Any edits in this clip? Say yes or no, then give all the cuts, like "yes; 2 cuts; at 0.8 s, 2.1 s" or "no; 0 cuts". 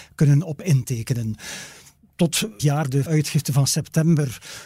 yes; 2 cuts; at 2.6 s, 3.1 s